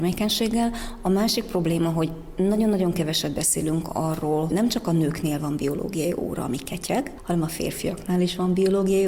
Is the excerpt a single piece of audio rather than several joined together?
no; 1 cut; at 4.5 s

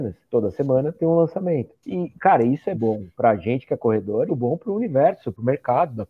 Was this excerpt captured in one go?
no; 3 cuts; at 2.7 s, 3.1 s, 4.3 s

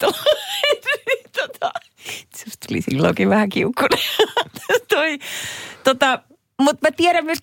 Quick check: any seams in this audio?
no; 0 cuts

